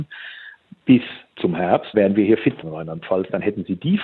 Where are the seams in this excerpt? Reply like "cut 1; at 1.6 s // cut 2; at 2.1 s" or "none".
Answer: cut 1; at 1.9 s // cut 2; at 2.6 s

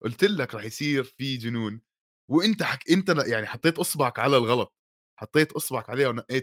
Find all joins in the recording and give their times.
none

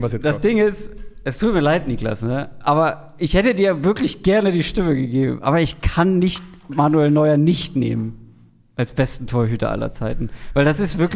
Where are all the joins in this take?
none

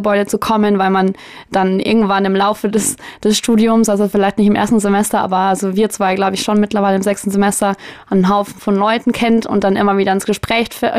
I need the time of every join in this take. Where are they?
none

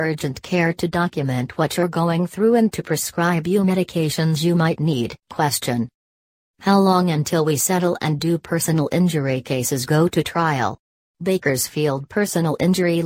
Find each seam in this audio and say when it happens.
cut 1; at 5.2 s

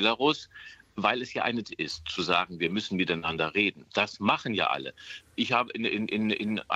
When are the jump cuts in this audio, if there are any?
cut 1; at 1.6 s

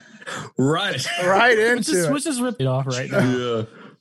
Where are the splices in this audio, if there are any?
cut 1; at 0.9 s // cut 2; at 2.6 s

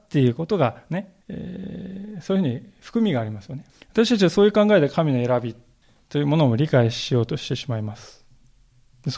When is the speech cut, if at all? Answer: cut 1; at 1.2 s // cut 2; at 3.7 s // cut 3; at 5.8 s

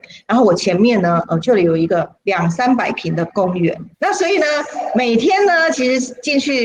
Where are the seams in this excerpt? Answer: cut 1; at 2.2 s // cut 2; at 3.9 s

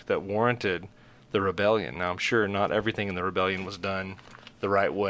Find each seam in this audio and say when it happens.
none

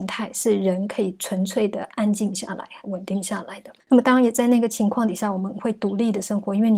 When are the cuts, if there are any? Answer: cut 1; at 2.8 s // cut 2; at 3.8 s

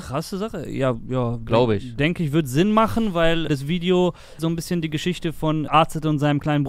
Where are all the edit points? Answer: cut 1; at 3.5 s // cut 2; at 4.4 s // cut 3; at 5.7 s

